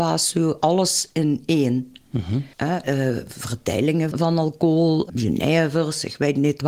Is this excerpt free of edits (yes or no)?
no